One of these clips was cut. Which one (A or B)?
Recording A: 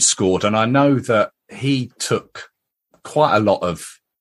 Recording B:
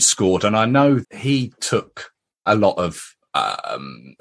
B